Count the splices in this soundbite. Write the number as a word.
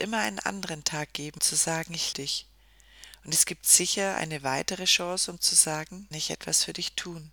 three